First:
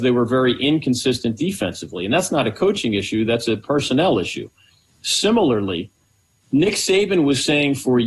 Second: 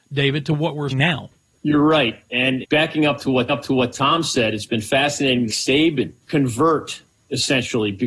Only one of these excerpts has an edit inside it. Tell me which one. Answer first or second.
second